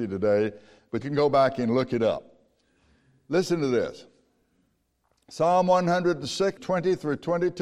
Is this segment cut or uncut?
cut